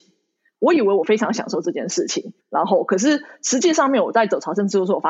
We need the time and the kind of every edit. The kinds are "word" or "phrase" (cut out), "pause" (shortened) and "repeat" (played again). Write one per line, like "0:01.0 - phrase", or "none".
0:02.4 - pause